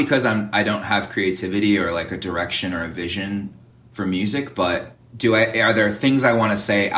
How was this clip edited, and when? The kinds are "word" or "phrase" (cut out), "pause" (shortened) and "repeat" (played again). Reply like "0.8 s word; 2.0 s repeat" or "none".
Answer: none

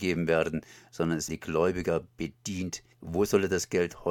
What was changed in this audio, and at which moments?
1.3 s word; 2.9 s pause

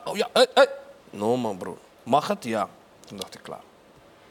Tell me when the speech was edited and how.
1.0 s pause; 2.8 s pause

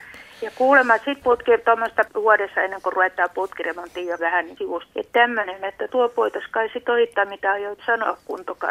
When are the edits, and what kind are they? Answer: 1.2 s phrase; 2.1 s phrase; 4.2 s word; 4.6 s word; 4.9 s word; 5.9 s word

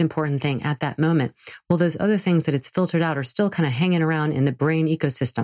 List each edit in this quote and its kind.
none

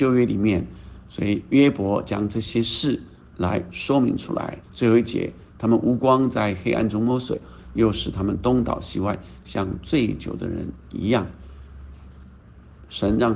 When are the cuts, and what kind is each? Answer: 4.6 s pause

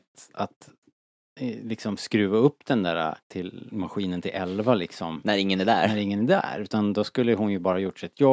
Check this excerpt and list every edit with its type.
3.2 s pause

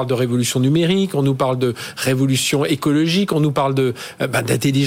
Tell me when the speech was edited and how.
none

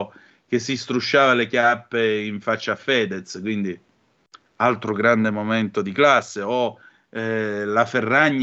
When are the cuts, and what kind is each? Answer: none

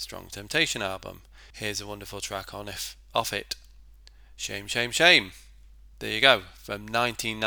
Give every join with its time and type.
1.5 s pause; 5.9 s pause

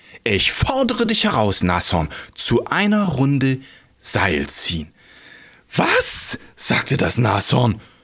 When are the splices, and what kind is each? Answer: none

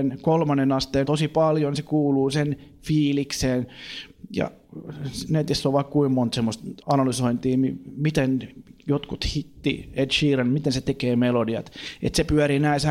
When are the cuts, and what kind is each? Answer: 1.0 s word; 6.8 s word

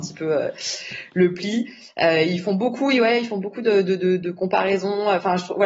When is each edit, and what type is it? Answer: none

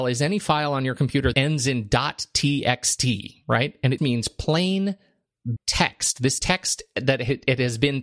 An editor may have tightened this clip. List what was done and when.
1.3 s word; 4.0 s word; 5.6 s word; 6.4 s word

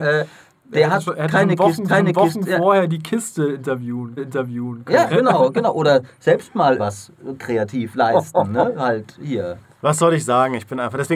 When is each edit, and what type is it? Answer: 1.9 s repeat; 4.2 s repeat; 5.1 s word; 6.8 s word

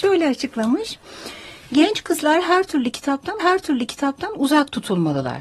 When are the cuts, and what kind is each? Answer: 3.4 s repeat

